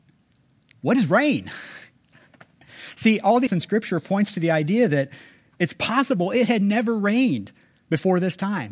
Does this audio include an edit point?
yes; 1 cut; at 3.5 s

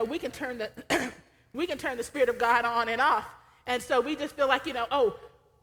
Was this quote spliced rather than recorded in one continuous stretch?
no; 0 cuts

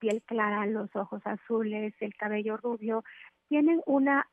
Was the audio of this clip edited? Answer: no; 0 cuts

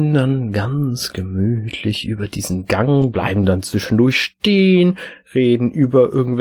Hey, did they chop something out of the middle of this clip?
no; 0 cuts

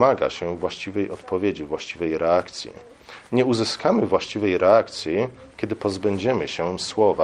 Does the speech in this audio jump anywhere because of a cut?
no; 0 cuts

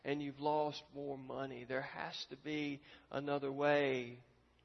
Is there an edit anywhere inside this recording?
no; 0 cuts

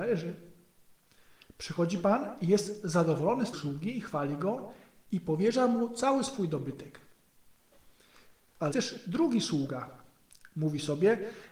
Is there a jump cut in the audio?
yes; 2 cuts; at 3.5 s, 8.7 s

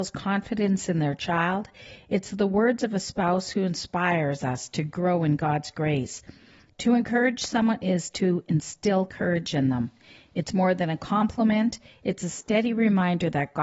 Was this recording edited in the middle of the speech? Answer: no; 0 cuts

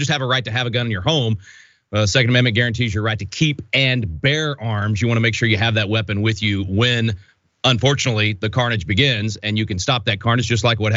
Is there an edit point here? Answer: no; 0 cuts

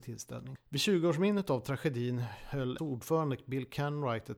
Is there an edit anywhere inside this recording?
yes; 1 cut; at 2.8 s

